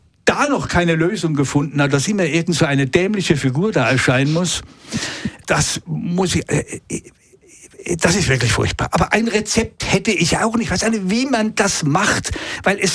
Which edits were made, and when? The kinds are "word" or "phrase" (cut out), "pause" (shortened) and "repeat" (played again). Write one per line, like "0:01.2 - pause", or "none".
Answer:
0:05.4 - word